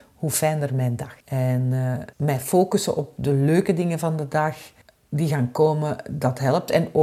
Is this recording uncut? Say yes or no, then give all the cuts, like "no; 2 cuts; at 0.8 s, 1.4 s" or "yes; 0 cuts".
no; 3 cuts; at 1.2 s, 2.1 s, 4.8 s